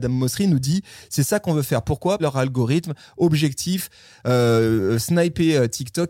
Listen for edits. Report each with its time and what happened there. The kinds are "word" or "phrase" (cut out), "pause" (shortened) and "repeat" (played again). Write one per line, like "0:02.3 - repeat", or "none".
0:02.2 - phrase